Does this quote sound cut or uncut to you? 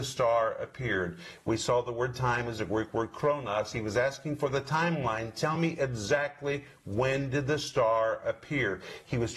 uncut